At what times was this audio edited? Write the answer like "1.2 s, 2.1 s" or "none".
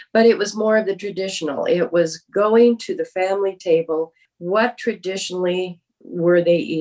none